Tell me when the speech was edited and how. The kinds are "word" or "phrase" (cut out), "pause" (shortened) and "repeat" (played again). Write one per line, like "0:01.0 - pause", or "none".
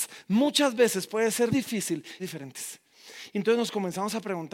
0:01.5 - word
0:02.2 - phrase